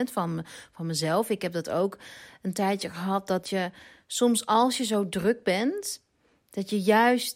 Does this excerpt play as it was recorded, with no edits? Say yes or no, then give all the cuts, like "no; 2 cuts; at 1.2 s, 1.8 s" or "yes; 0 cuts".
yes; 0 cuts